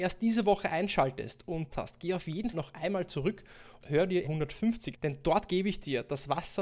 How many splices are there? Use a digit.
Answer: 5